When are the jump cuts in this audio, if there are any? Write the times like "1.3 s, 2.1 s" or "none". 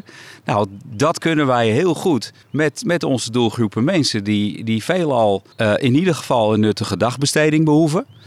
2.4 s, 5.5 s

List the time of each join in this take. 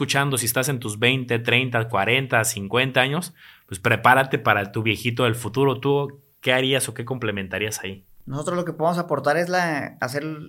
none

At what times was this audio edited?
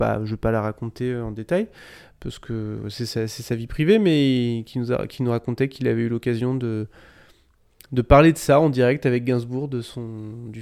none

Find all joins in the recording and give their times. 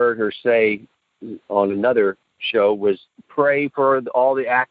none

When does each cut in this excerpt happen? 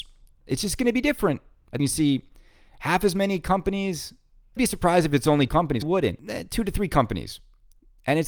1.8 s, 4.6 s, 5.5 s, 5.8 s

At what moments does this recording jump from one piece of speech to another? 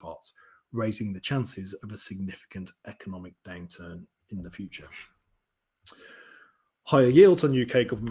none

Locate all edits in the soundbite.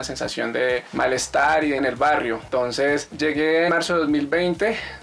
1.8 s, 3.7 s

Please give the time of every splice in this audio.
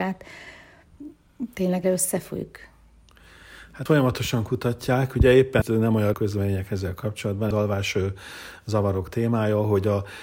1.8 s, 3.9 s, 5.6 s, 6.1 s, 7.5 s

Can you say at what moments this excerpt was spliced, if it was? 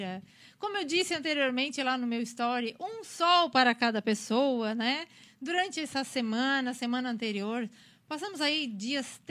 none

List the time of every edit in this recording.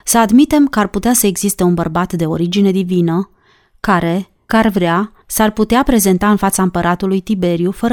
4.5 s, 5.2 s

